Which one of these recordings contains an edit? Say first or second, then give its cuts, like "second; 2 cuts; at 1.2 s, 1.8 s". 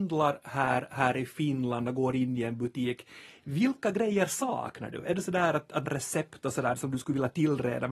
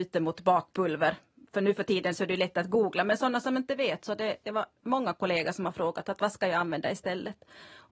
first; 1 cut; at 5.9 s